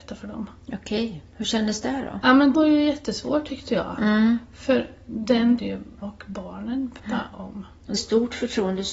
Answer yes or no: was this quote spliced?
yes